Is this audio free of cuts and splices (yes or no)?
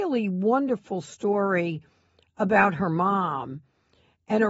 yes